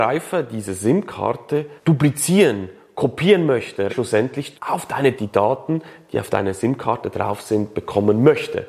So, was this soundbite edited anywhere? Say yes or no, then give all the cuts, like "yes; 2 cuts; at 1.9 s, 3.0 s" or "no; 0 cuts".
yes; 4 cuts; at 1.8 s, 3.9 s, 4.5 s, 5.2 s